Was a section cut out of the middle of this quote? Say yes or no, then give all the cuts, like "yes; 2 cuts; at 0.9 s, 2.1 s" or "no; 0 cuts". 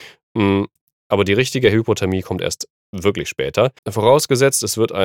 yes; 1 cut; at 3.8 s